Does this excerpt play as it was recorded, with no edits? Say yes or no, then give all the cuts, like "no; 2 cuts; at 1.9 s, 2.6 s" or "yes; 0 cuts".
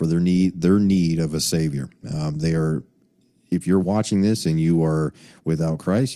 yes; 0 cuts